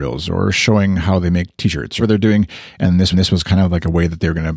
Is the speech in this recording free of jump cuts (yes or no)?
no